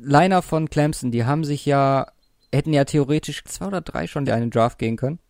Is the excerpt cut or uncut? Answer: cut